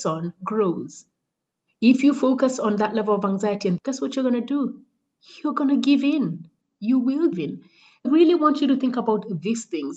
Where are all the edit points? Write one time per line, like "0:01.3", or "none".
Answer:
0:03.8
0:07.3
0:08.0